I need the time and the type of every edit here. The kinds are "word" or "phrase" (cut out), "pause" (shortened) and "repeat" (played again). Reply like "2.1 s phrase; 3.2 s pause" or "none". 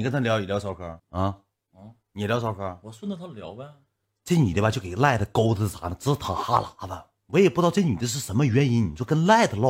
1.0 s pause; 4.0 s pause